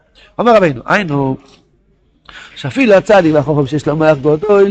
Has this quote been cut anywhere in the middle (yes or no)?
no